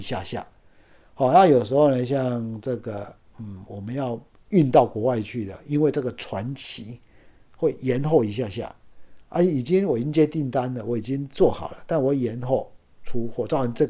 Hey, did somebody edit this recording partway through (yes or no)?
no